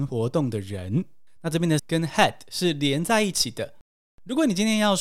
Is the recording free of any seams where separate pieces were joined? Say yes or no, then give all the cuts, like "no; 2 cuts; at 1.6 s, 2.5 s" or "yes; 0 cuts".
no; 1 cut; at 1.8 s